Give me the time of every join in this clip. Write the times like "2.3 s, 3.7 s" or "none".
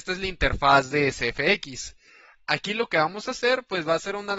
none